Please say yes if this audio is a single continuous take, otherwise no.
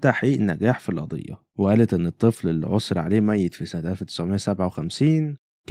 no